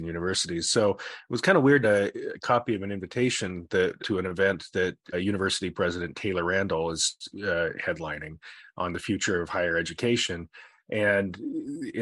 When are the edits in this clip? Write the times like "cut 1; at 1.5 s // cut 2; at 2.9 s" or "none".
cut 1; at 1.8 s // cut 2; at 4.0 s // cut 3; at 5.1 s

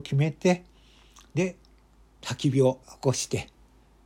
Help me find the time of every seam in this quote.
cut 1; at 1.7 s // cut 2; at 2.8 s

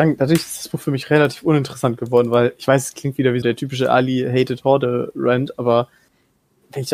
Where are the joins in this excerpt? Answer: cut 1; at 3.4 s

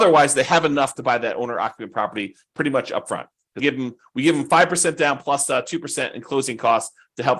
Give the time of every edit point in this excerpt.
cut 1; at 3.6 s

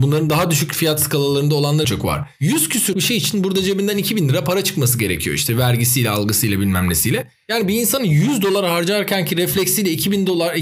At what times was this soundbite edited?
cut 1; at 1.8 s // cut 2; at 2.9 s

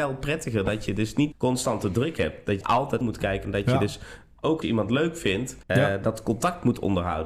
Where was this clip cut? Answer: cut 1; at 1.3 s // cut 2; at 2.6 s // cut 3; at 3.0 s // cut 4; at 3.4 s // cut 5; at 4.6 s // cut 6; at 5.6 s

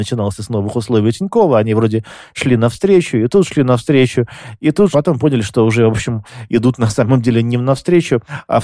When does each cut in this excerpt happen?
cut 1; at 4.9 s

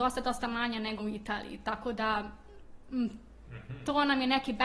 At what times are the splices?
cut 1; at 1.0 s

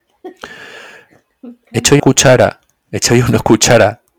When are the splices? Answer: cut 1; at 2.0 s

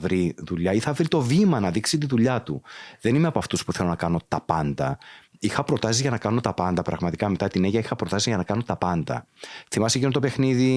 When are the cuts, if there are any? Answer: none

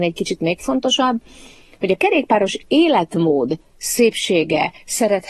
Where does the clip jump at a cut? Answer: none

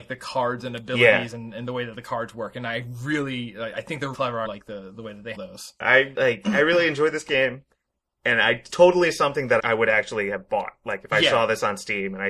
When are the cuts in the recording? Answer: cut 1; at 4.1 s // cut 2; at 4.4 s // cut 3; at 5.3 s // cut 4; at 5.8 s // cut 5; at 6.1 s // cut 6; at 8.7 s // cut 7; at 9.6 s

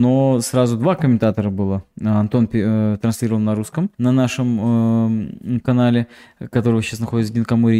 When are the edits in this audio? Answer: cut 1; at 3.9 s

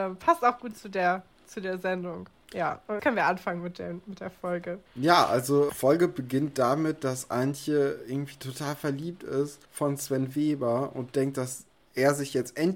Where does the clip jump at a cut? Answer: cut 1; at 3.0 s // cut 2; at 4.9 s // cut 3; at 5.7 s // cut 4; at 9.6 s

